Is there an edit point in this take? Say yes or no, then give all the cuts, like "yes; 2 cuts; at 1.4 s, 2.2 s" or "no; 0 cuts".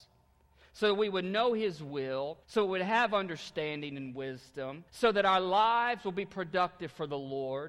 yes; 2 cuts; at 2.4 s, 4.9 s